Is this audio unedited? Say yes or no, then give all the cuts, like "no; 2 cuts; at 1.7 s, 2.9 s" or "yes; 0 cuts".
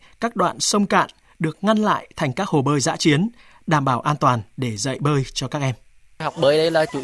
yes; 0 cuts